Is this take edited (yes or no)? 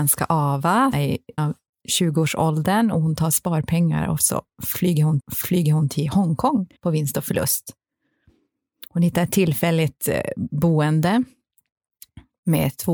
yes